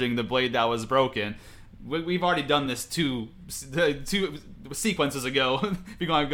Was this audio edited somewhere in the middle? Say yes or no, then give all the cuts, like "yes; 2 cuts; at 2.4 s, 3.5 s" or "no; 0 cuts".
no; 0 cuts